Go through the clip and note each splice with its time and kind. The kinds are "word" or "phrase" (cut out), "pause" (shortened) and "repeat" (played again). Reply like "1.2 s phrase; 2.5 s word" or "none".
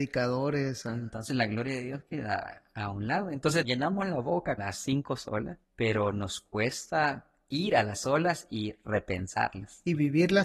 3.6 s word; 4.6 s word; 5.6 s pause